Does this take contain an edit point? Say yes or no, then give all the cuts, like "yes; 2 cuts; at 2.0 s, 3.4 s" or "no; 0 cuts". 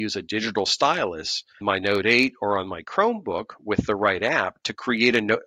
yes; 1 cut; at 1.6 s